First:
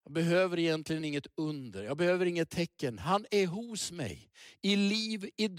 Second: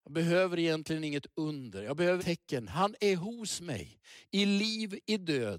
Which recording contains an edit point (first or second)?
second